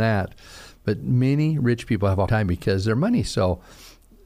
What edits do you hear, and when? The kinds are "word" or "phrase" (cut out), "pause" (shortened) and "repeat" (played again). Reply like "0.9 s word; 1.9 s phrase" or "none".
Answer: 2.3 s word

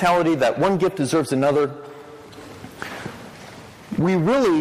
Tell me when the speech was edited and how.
none

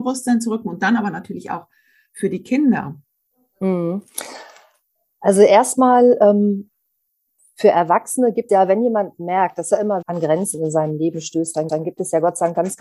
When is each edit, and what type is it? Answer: 8.5 s word; 10.0 s word; 11.7 s repeat

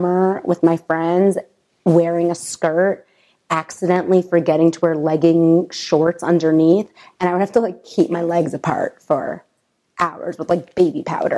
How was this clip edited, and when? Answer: none

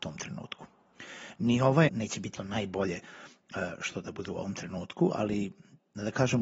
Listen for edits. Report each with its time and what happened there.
1.9 s word; 2.3 s word; 4.0 s word

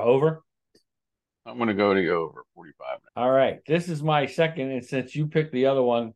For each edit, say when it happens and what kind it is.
3.1 s pause

